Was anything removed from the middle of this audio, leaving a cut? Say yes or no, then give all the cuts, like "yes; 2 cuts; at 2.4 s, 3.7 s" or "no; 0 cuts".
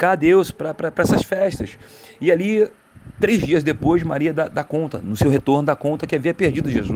no; 0 cuts